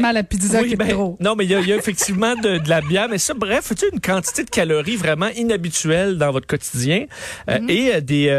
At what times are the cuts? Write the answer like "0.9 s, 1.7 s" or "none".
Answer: none